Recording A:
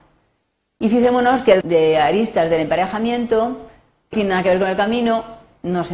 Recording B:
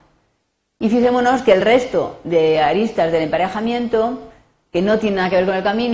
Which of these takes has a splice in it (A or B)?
A